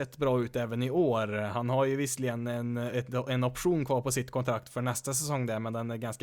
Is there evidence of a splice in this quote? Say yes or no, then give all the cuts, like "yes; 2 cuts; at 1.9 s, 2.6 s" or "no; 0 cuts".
no; 0 cuts